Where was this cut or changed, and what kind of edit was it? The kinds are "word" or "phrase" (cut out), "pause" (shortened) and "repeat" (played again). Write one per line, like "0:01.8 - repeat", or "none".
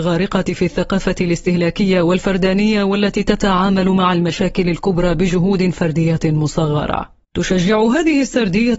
0:07.2 - pause